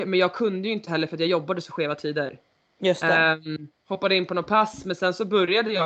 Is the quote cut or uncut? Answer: cut